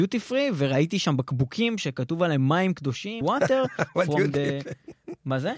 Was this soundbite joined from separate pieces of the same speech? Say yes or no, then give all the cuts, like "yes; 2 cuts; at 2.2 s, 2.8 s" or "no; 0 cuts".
yes; 1 cut; at 3.2 s